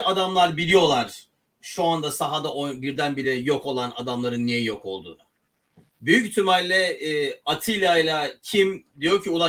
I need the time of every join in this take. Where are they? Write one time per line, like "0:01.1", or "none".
none